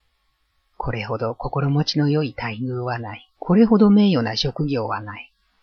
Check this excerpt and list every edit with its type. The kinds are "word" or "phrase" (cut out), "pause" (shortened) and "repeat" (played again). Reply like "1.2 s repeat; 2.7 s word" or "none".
3.3 s pause